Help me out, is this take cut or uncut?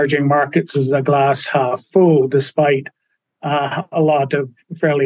uncut